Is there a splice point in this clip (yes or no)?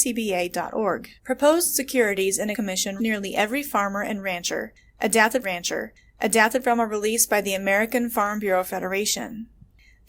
yes